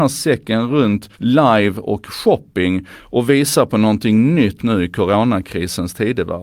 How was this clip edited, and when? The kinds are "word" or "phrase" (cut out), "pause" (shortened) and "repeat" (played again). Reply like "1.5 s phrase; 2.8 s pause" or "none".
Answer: 1.1 s pause; 4.6 s phrase